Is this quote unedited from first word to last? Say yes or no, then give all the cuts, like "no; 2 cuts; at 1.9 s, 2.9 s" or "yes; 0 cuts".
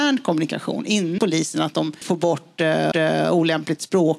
no; 3 cuts; at 1.2 s, 2.0 s, 2.9 s